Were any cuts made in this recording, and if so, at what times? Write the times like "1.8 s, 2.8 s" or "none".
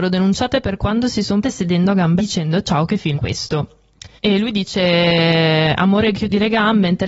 1.4 s, 2.2 s, 3.2 s, 4.2 s